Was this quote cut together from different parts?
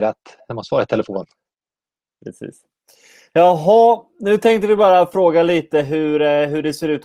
no; 0 cuts

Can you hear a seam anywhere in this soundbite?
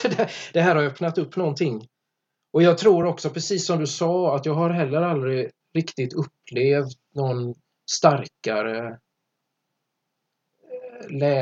no; 0 cuts

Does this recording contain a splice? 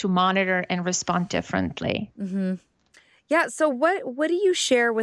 no; 0 cuts

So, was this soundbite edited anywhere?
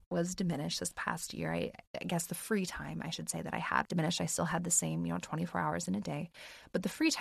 yes; 1 cut; at 3.8 s

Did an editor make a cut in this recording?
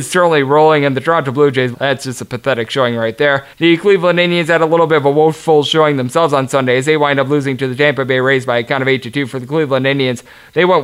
yes; 2 cuts; at 1.7 s, 3.5 s

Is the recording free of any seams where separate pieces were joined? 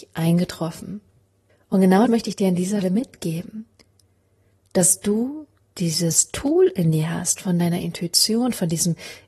no; 4 cuts; at 1.5 s, 2.1 s, 2.8 s, 5.6 s

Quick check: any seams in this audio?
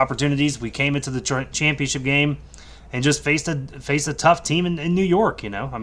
no; 0 cuts

